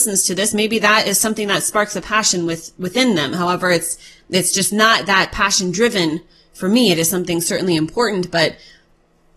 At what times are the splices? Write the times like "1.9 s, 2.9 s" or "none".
none